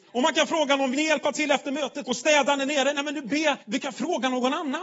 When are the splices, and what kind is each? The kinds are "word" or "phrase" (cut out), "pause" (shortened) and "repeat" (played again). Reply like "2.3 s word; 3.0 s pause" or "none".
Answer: 0.9 s word; 2.0 s word; 3.6 s pause